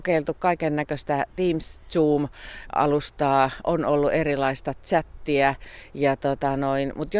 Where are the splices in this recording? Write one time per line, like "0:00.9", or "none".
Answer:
0:01.3